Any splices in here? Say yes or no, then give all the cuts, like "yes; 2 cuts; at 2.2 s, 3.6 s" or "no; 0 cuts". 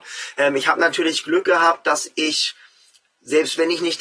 no; 0 cuts